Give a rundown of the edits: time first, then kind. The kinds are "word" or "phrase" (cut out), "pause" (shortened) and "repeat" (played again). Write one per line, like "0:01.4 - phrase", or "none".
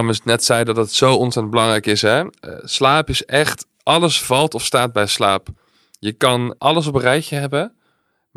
0:06.6 - word